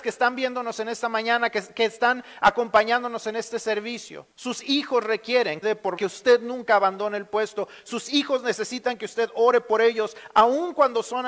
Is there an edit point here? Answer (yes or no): yes